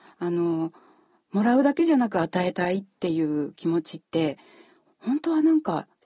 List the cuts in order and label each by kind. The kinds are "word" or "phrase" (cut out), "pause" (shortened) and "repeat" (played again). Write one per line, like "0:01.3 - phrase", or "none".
none